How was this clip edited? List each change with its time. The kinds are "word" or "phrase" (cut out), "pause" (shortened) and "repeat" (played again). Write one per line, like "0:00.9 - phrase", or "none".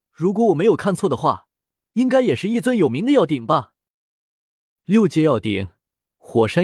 none